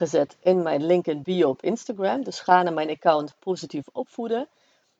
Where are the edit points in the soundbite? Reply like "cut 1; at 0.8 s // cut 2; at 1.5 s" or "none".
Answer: none

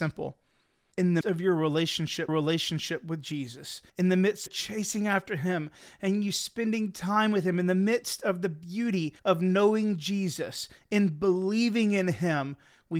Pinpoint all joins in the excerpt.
cut 1; at 1.2 s // cut 2; at 2.3 s // cut 3; at 3.9 s // cut 4; at 4.5 s // cut 5; at 9.2 s

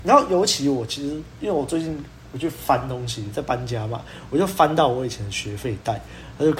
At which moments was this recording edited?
none

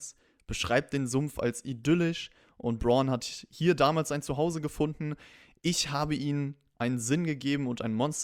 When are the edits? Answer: none

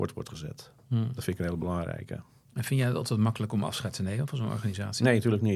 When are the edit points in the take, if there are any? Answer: none

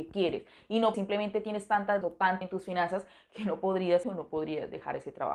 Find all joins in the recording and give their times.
cut 1; at 0.9 s // cut 2; at 2.0 s // cut 3; at 2.4 s // cut 4; at 4.0 s

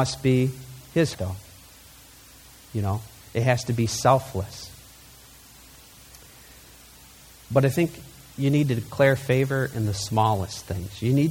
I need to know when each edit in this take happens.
cut 1; at 1.1 s

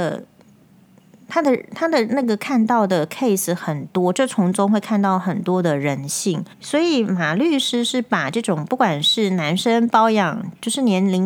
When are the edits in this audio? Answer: cut 1; at 6.5 s

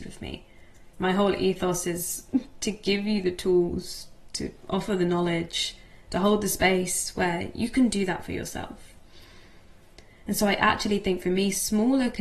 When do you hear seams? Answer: cut 1; at 0.9 s

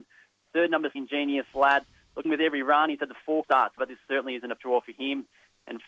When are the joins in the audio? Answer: cut 1; at 0.9 s // cut 2; at 2.2 s // cut 3; at 3.4 s // cut 4; at 3.8 s // cut 5; at 4.6 s

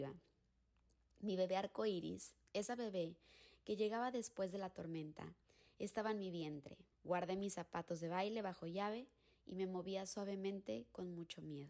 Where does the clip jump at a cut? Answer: cut 1; at 6.9 s

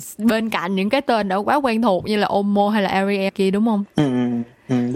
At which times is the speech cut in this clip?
cut 1; at 3.3 s

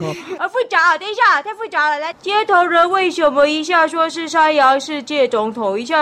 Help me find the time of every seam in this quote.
cut 1; at 2.1 s

